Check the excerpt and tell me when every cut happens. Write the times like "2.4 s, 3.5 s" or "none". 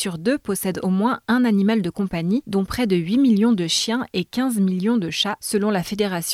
none